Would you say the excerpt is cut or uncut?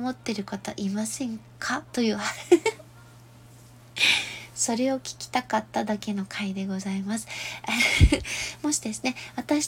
cut